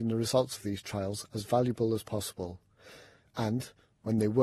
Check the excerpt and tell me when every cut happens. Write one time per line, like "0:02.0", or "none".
none